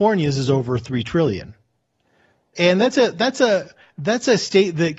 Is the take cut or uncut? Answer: uncut